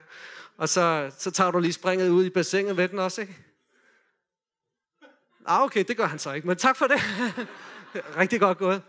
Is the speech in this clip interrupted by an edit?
no; 0 cuts

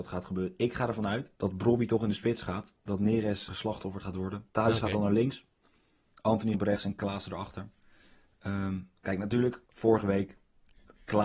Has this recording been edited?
yes; 5 cuts; at 1.4 s, 3.5 s, 4.5 s, 6.5 s, 9.7 s

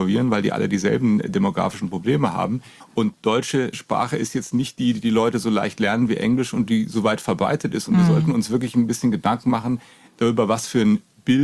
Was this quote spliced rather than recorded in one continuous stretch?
no; 0 cuts

